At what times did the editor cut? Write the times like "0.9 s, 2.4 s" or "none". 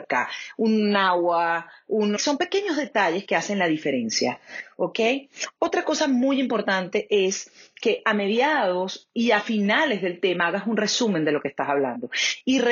2.2 s